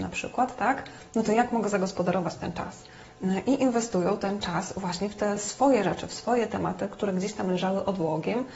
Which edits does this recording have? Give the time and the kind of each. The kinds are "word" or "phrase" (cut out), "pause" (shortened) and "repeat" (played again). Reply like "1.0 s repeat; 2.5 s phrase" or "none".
none

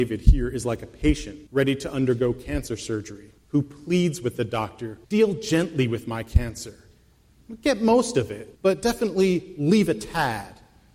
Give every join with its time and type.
1.5 s pause; 3.4 s pause; 5.0 s pause; 8.5 s pause

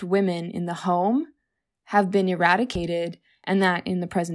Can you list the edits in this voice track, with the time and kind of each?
none

